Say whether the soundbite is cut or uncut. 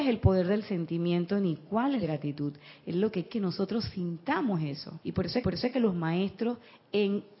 cut